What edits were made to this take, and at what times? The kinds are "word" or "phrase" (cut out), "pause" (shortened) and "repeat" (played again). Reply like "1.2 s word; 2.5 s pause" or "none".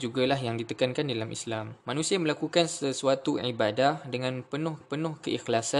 1.8 s pause; 4.8 s repeat